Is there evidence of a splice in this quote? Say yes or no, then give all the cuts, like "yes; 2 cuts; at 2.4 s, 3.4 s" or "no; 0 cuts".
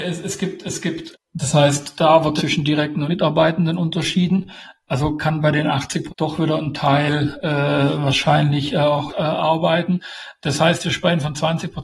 yes; 5 cuts; at 1.1 s, 2.4 s, 3.1 s, 6.1 s, 9.1 s